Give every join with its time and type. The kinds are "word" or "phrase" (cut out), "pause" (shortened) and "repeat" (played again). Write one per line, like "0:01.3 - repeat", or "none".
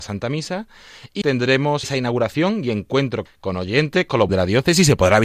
0:01.2 - word
0:01.8 - word
0:03.3 - word
0:04.3 - word